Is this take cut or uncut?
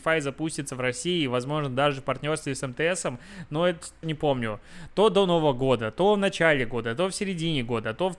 cut